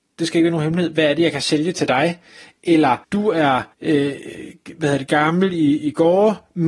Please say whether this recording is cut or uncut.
cut